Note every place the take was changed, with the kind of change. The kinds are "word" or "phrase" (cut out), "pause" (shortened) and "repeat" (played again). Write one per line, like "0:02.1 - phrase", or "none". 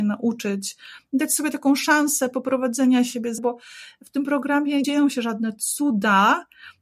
0:03.4 - word
0:04.8 - word